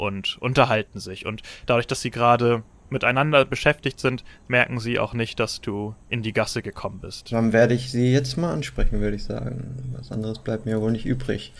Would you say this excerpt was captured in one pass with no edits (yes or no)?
no